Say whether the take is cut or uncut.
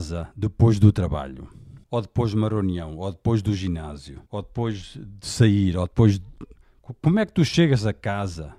cut